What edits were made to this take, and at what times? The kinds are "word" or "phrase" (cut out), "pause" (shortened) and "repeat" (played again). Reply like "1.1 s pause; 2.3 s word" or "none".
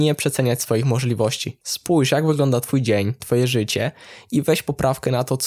1.6 s pause; 3.2 s word